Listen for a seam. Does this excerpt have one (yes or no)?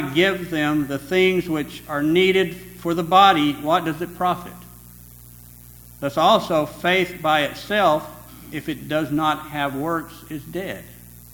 no